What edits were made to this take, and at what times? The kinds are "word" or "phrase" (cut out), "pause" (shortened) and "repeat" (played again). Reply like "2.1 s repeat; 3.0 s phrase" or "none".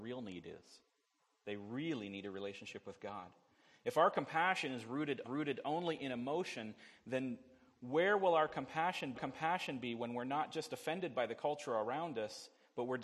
5.2 s repeat; 9.1 s repeat